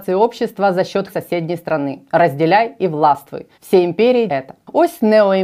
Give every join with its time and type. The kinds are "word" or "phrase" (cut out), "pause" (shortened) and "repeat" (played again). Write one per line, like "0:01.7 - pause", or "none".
0:01.1 - word
0:03.5 - pause
0:04.3 - word